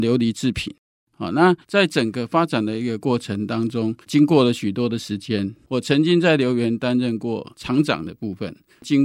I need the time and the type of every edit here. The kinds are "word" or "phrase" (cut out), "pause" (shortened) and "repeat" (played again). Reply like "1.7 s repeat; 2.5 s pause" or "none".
1.6 s pause; 4.0 s pause

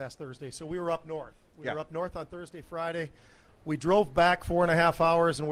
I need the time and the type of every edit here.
none

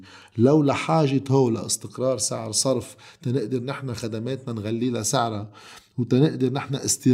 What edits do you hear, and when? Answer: none

